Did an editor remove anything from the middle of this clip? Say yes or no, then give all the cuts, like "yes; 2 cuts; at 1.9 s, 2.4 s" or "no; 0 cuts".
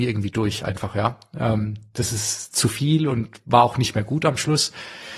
no; 0 cuts